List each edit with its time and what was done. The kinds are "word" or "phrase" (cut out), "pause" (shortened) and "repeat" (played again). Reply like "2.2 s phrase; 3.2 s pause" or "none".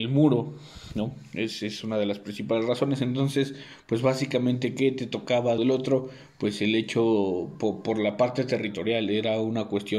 5.6 s phrase